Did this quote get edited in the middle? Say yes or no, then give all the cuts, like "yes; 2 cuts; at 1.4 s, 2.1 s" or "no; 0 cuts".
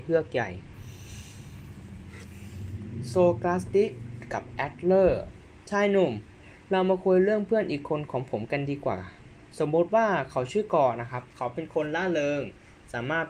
no; 0 cuts